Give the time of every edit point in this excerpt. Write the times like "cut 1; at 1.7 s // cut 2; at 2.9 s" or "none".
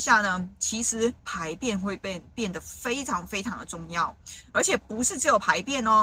cut 1; at 1.2 s